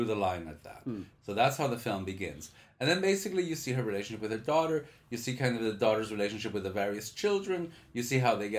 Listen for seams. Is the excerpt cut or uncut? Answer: uncut